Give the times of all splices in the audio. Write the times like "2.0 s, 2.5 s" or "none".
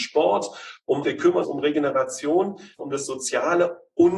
1.0 s, 1.4 s, 2.8 s